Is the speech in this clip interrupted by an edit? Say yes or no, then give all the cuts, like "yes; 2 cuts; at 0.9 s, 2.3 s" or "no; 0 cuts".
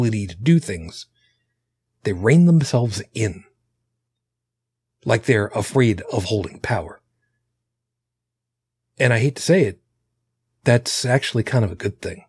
no; 0 cuts